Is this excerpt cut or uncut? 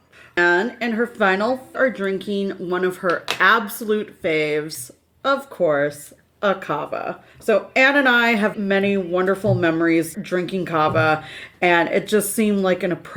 cut